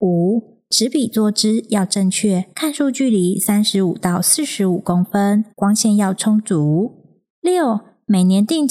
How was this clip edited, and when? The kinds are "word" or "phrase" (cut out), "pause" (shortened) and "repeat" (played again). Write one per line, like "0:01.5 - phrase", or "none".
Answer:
0:02.5 - pause
0:05.5 - pause
0:07.3 - pause